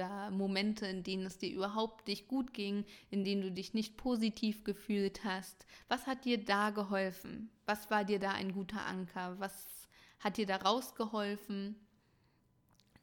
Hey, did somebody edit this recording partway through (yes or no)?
no